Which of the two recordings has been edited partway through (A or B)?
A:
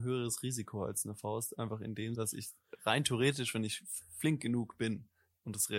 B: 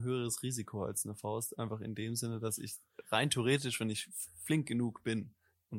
A